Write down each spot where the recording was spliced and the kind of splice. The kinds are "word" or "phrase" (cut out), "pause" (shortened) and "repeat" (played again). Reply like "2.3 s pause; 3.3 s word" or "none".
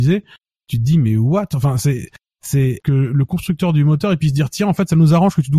2.8 s word